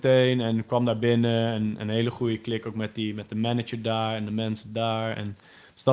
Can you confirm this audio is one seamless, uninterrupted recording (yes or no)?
yes